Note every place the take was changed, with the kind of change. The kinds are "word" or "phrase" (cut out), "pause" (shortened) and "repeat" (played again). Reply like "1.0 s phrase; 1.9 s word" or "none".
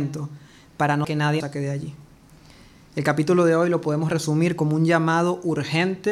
1.0 s word; 1.4 s word